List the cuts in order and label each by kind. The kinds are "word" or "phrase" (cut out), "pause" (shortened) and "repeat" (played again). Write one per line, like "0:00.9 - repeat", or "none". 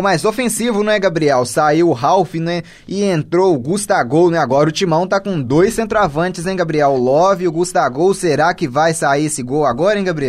none